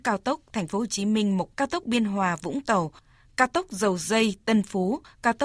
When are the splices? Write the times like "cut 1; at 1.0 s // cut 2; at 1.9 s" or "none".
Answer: cut 1; at 1.5 s